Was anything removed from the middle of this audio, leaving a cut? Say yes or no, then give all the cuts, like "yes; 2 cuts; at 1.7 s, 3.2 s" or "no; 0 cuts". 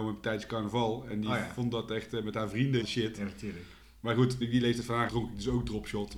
yes; 3 cuts; at 2.8 s, 4.4 s, 5.1 s